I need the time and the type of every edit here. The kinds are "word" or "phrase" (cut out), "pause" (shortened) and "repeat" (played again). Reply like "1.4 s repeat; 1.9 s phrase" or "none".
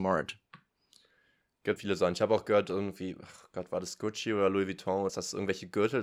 1.8 s word; 5.1 s word